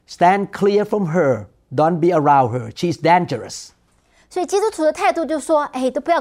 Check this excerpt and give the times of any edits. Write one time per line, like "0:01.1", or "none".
none